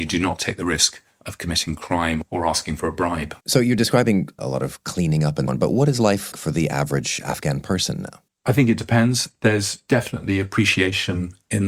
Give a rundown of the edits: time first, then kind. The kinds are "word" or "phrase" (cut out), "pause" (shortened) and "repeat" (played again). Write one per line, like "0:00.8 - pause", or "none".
0:03.4 - pause
0:04.4 - phrase
0:05.5 - word
0:06.3 - word
0:08.3 - pause